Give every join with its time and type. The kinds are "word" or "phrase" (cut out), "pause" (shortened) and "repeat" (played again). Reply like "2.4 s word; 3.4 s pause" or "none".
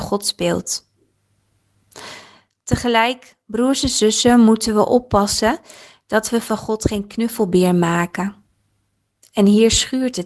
none